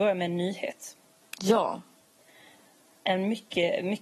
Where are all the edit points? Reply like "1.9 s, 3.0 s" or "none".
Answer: none